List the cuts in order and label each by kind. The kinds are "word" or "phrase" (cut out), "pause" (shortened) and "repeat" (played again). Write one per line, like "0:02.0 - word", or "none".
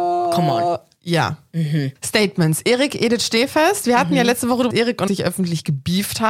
0:04.7 - phrase
0:05.1 - word